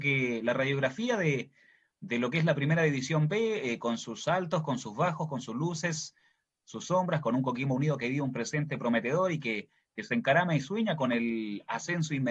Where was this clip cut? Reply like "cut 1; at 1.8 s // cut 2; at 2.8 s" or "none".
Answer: none